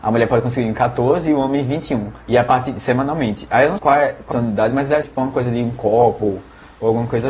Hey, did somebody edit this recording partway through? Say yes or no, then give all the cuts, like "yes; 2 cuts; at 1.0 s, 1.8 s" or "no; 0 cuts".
yes; 4 cuts; at 2.2 s, 3.8 s, 4.3 s, 5.0 s